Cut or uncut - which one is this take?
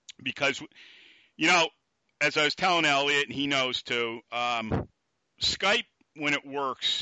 uncut